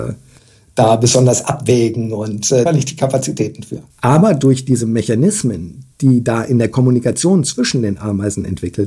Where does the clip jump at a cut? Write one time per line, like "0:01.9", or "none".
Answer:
0:02.7
0:03.9
0:05.9